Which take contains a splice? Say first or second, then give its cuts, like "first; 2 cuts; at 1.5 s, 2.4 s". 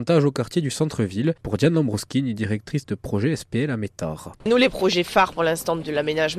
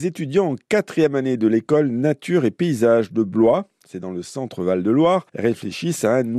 second; 1 cut; at 5.3 s